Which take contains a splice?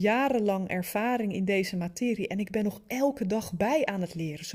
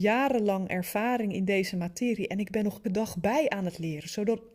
second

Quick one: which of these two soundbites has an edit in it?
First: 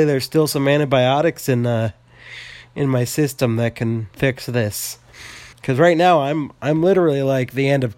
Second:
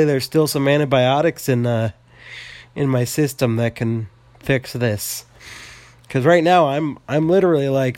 first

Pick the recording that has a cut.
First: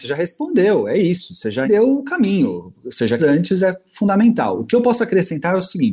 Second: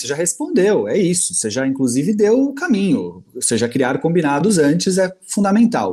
first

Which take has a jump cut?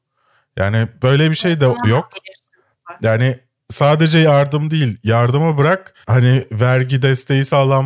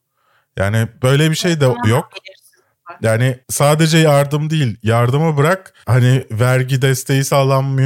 second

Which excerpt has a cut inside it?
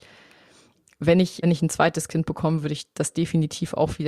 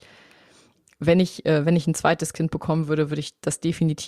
first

